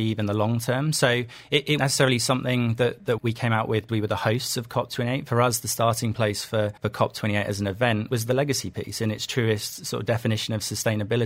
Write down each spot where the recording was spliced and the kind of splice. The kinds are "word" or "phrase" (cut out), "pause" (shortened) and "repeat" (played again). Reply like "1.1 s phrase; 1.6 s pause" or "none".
1.8 s word; 3.2 s word; 3.9 s word; 6.8 s pause; 8.1 s word